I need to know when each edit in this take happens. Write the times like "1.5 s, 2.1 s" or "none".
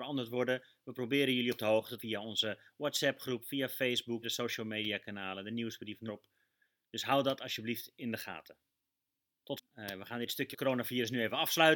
2.0 s, 4.2 s, 6.1 s, 9.6 s, 10.5 s